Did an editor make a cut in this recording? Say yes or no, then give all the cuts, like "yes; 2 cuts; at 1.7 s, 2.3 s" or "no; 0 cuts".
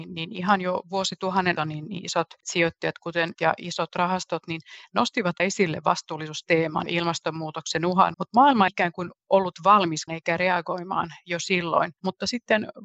yes; 8 cuts; at 1.6 s, 2.4 s, 3.3 s, 5.4 s, 6.9 s, 8.1 s, 8.7 s, 10.1 s